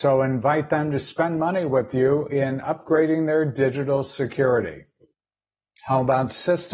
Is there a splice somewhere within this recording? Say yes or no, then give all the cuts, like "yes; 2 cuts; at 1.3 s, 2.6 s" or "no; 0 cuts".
no; 0 cuts